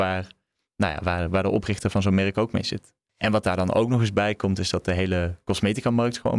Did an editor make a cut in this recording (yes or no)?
no